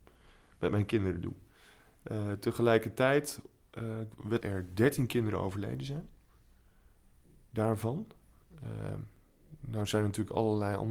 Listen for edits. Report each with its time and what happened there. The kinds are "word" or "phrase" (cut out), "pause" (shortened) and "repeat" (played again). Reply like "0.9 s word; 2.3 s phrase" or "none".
4.4 s phrase